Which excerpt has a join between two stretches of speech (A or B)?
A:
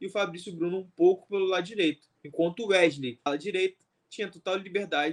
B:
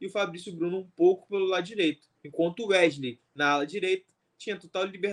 A